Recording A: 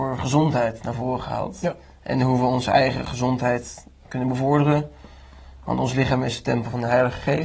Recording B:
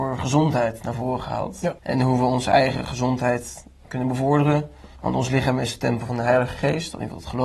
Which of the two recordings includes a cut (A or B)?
B